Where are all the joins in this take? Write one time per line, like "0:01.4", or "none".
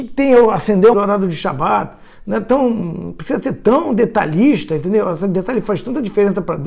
0:00.9